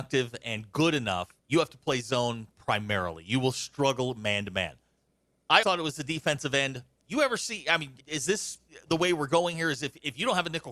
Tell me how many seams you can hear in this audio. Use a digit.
4